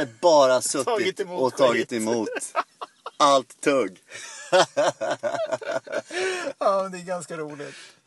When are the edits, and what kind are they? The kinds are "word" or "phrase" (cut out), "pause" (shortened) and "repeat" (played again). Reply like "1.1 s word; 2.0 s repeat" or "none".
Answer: none